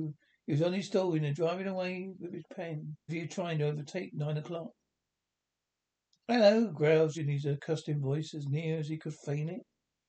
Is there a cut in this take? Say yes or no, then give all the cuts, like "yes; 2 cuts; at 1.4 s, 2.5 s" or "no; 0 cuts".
yes; 3 cuts; at 1.3 s, 3.1 s, 7.1 s